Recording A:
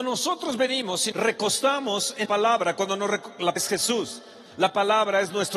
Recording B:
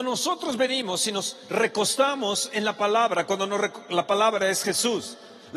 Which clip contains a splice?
A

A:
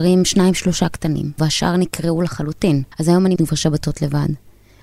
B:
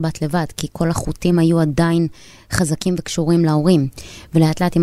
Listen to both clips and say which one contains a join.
A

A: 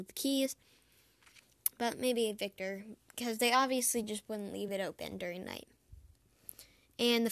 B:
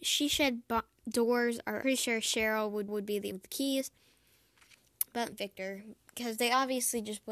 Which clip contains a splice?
B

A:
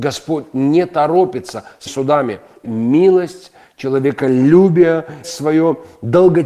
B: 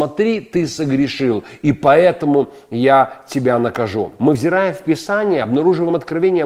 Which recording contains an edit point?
A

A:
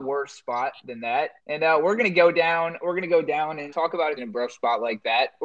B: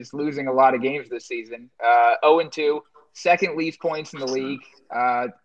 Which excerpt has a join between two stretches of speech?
A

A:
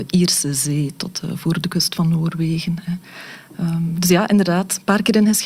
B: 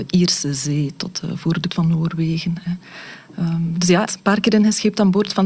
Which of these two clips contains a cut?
B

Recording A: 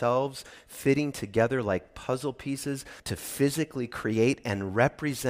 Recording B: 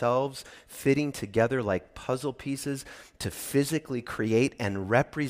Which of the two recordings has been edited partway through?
A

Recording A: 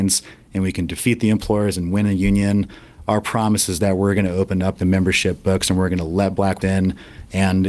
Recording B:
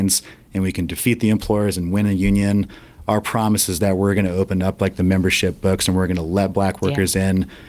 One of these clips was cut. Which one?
A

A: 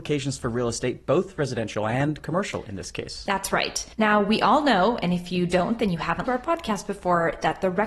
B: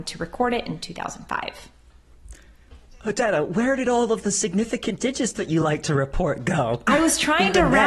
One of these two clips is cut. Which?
A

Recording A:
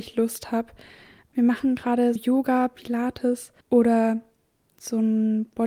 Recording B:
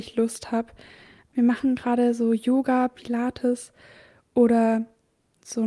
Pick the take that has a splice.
A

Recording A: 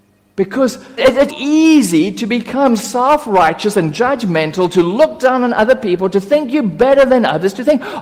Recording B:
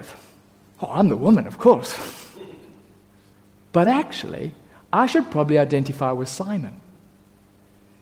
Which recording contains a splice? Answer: A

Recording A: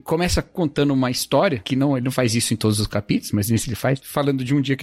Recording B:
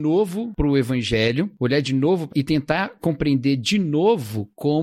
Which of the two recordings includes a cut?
B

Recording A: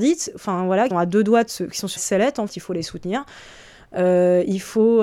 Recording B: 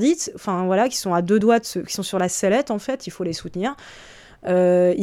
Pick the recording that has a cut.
A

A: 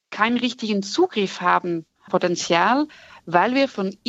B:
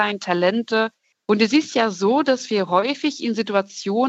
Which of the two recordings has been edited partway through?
A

